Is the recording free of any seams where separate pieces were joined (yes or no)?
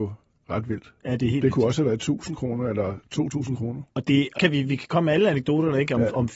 no